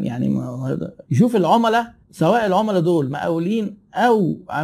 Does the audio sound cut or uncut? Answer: cut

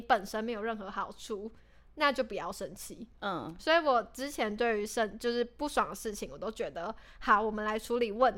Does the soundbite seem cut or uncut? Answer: uncut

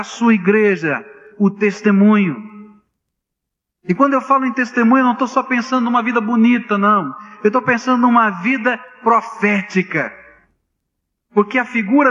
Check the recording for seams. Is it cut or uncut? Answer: uncut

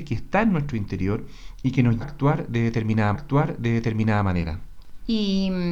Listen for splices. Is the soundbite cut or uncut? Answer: cut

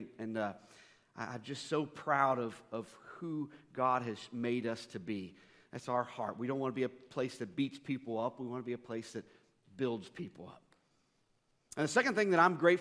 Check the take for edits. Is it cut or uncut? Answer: uncut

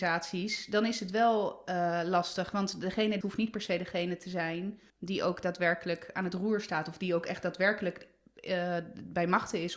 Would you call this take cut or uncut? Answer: cut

